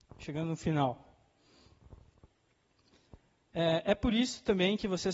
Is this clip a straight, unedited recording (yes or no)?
yes